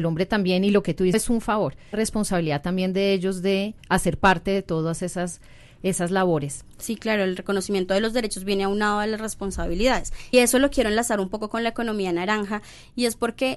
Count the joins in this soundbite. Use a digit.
4